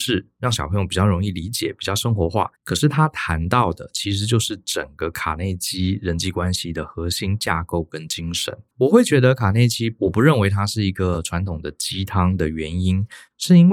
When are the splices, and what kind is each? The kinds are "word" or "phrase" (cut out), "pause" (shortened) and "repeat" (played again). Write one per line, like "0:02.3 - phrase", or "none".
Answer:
0:02.5 - pause
0:08.7 - pause